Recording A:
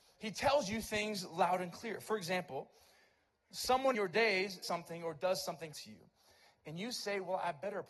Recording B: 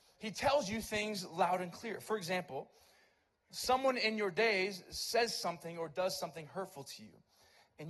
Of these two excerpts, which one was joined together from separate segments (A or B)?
A